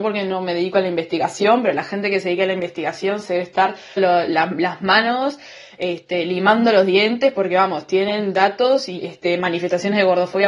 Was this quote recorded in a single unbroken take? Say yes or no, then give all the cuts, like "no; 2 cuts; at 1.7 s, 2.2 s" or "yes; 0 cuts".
no; 2 cuts; at 4.0 s, 9.0 s